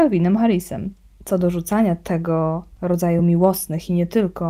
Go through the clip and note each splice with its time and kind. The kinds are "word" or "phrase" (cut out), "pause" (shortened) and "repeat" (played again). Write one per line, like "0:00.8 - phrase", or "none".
none